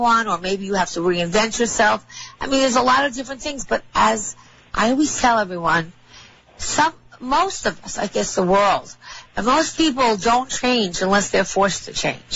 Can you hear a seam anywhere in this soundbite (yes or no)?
no